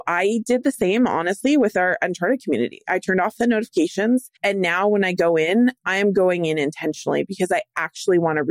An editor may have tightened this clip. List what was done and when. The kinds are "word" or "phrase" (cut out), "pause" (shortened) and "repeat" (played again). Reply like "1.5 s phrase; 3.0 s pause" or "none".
4.4 s pause